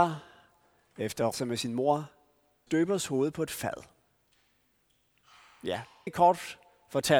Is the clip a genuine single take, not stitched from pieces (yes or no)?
no